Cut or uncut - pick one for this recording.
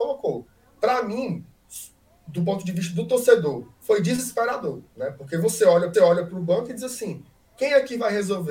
cut